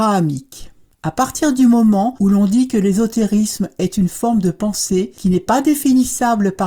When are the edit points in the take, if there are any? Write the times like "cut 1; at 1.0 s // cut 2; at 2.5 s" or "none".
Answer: none